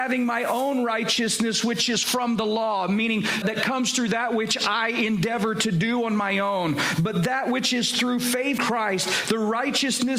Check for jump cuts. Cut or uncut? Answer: cut